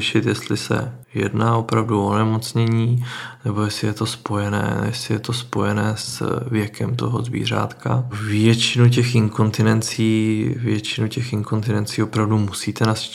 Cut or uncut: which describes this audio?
cut